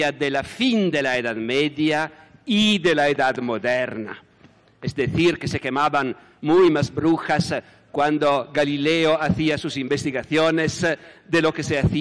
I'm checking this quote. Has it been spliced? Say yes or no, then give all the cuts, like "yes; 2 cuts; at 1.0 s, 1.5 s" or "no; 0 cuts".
no; 0 cuts